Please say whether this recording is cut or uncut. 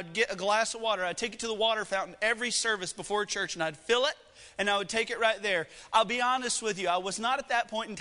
uncut